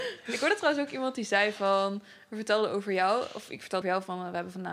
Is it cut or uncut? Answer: cut